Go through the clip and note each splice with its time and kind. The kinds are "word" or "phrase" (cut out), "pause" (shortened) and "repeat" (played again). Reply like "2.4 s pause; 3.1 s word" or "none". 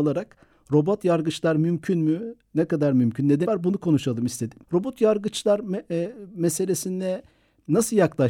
3.4 s word; 4.6 s pause